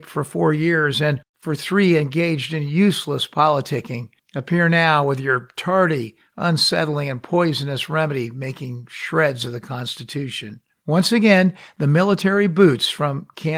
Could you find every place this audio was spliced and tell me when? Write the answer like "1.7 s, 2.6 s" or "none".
none